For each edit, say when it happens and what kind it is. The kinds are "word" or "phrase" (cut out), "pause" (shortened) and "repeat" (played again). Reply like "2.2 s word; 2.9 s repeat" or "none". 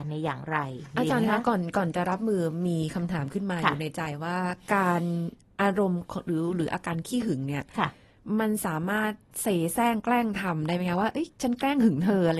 11.3 s pause